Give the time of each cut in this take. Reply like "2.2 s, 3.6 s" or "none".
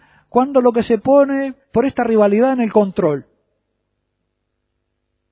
1.6 s